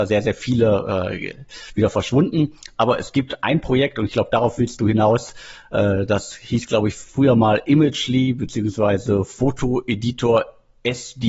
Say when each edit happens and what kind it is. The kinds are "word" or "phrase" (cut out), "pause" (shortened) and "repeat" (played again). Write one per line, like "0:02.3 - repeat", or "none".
none